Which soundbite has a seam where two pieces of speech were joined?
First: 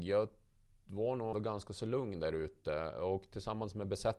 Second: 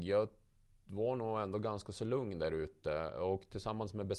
first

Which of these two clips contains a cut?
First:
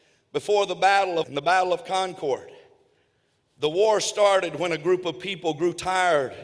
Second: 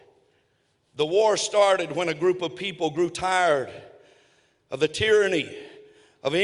first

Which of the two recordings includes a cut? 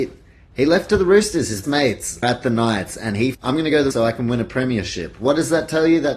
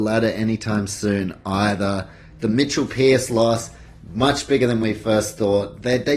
first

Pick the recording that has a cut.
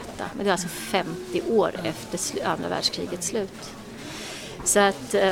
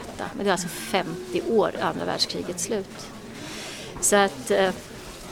second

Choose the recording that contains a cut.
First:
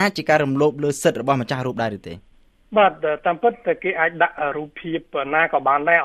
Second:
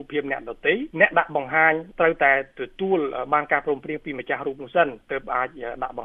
second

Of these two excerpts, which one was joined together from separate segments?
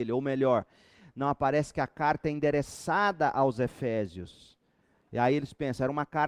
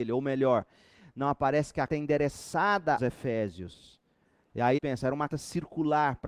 second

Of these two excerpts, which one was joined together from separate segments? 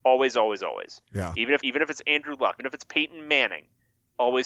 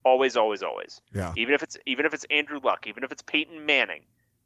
first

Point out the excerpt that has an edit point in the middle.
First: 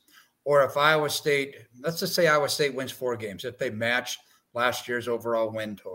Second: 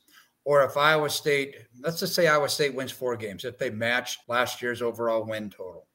second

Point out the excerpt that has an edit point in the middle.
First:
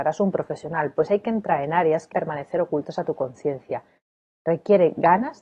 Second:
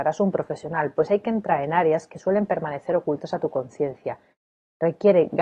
first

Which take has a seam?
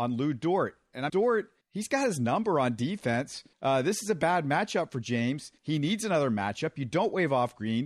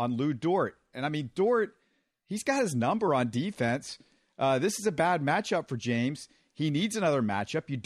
first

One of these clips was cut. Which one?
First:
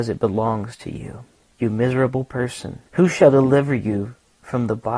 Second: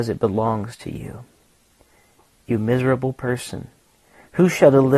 first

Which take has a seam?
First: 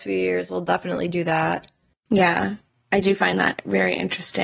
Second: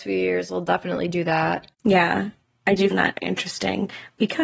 second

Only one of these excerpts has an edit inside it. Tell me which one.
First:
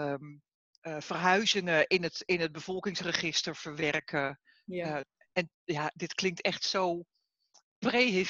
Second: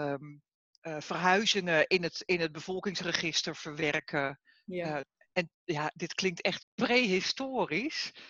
second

